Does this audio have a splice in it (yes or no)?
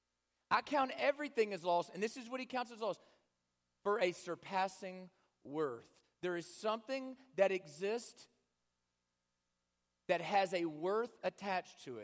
no